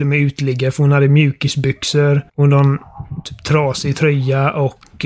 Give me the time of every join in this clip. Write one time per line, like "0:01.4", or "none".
0:02.3